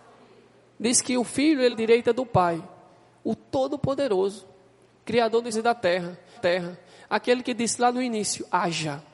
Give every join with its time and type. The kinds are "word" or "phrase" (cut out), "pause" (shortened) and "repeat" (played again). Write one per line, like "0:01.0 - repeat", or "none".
0:01.7 - word
0:05.5 - word
0:06.4 - repeat